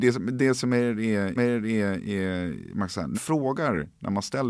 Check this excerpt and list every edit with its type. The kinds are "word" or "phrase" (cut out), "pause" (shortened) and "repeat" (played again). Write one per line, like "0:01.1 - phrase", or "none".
0:01.4 - repeat
0:03.1 - word

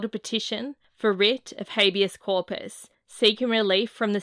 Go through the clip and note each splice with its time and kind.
none

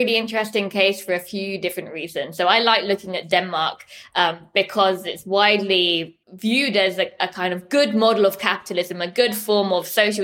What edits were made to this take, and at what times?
0:06.2 - pause

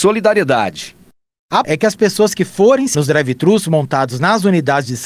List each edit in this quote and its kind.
0:01.6 - word
0:02.9 - word

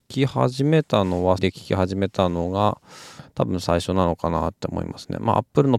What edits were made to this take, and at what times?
0:01.4 - word

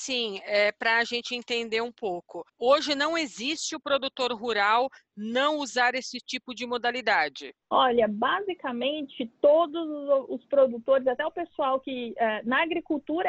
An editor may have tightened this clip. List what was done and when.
0:02.5 - pause

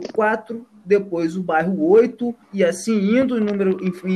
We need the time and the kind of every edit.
0:02.4 - pause

